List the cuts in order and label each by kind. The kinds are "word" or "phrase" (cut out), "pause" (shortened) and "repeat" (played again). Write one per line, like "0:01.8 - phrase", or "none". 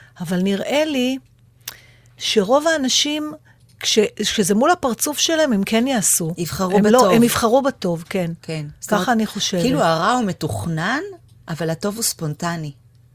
none